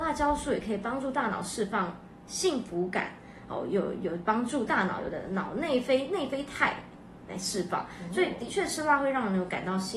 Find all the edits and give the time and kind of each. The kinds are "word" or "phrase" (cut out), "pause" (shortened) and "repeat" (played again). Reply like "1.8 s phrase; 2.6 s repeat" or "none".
none